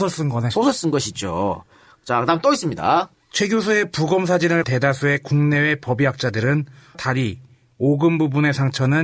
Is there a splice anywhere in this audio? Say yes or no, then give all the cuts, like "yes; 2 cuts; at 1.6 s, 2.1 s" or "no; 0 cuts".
yes; 3 cuts; at 3.1 s, 4.6 s, 6.9 s